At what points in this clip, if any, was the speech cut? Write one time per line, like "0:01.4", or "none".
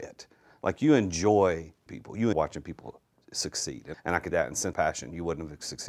0:01.9
0:02.3
0:03.9
0:04.3
0:04.7